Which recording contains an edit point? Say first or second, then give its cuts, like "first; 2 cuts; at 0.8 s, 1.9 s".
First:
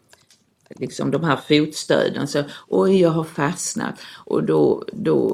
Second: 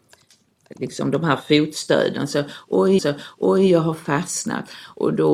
second; 1 cut; at 3.0 s